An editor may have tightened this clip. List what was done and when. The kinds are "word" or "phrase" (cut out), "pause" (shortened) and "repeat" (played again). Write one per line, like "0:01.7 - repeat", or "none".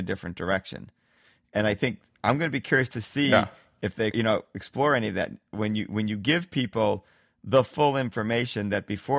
0:04.1 - word